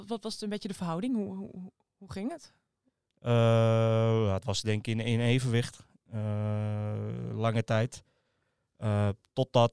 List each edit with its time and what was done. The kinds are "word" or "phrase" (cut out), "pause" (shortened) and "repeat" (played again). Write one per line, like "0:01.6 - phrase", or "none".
none